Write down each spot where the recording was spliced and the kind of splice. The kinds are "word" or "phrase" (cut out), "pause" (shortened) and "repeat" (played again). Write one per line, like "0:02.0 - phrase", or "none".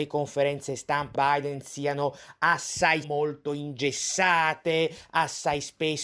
0:01.1 - word
0:03.0 - word